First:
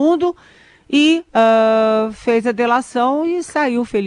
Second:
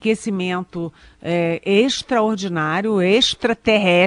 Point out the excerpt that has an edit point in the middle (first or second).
first